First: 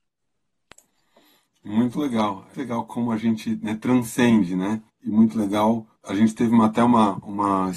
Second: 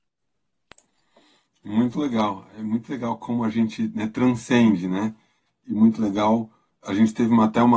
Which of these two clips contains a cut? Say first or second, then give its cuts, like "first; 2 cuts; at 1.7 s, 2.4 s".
first; 3 cuts; at 2.5 s, 4.9 s, 6.0 s